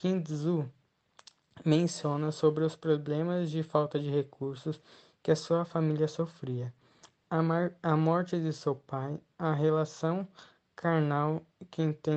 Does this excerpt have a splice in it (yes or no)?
no